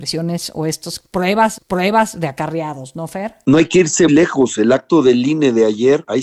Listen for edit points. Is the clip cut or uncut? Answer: cut